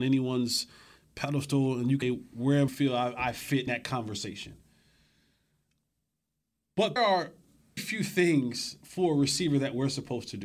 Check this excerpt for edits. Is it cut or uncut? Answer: cut